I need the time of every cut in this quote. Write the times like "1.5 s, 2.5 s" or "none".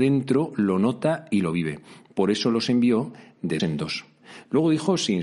3.6 s